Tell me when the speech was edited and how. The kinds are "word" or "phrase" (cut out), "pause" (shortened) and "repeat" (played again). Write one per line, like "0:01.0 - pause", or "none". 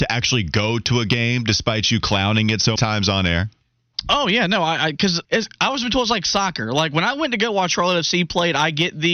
0:02.8 - word
0:05.2 - pause